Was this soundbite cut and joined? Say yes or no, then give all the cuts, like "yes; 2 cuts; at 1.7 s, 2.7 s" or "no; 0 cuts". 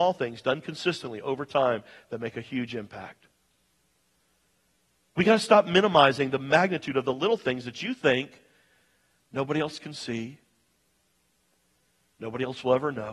no; 0 cuts